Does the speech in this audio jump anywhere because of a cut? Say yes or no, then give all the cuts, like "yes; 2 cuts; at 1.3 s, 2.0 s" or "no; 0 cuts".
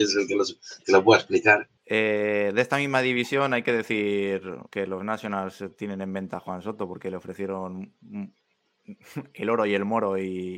yes; 2 cuts; at 1.8 s, 4.7 s